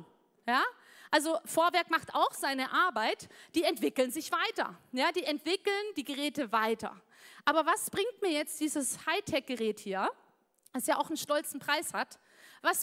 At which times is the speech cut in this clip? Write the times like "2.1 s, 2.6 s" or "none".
none